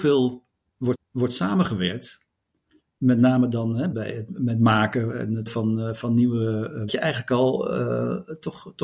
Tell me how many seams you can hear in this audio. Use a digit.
4